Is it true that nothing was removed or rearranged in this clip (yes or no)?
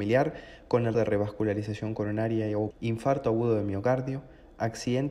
no